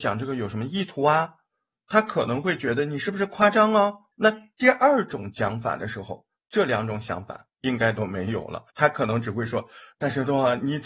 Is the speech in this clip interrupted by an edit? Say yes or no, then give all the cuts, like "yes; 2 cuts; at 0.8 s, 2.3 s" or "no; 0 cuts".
yes; 2 cuts; at 4.1 s, 8.7 s